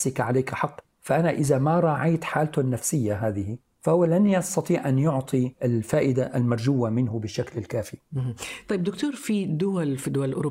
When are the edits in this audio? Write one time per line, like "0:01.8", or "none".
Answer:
none